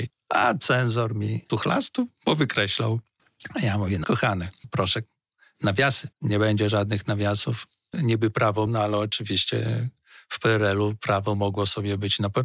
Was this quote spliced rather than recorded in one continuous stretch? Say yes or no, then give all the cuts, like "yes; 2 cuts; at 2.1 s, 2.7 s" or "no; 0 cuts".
yes; 4 cuts; at 1.5 s, 4.0 s, 6.1 s, 8.7 s